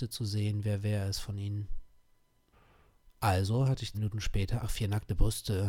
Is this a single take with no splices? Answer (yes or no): no